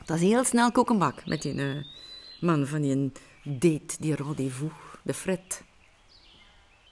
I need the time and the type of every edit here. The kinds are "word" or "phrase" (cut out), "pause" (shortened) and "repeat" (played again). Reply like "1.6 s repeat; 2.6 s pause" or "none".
5.0 s pause